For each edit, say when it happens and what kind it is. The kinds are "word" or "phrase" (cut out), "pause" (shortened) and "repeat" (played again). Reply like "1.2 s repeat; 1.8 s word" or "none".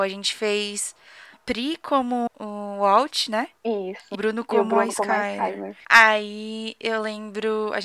1.3 s word; 2.3 s word; 3.6 s pause; 4.1 s word